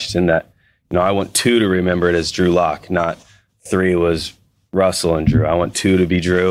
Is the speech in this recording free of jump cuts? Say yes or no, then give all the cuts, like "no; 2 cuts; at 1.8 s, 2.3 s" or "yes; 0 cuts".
yes; 0 cuts